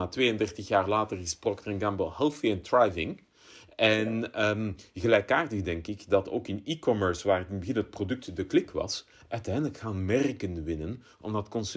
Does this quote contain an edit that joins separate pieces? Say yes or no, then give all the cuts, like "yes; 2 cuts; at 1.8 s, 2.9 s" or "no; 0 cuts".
no; 0 cuts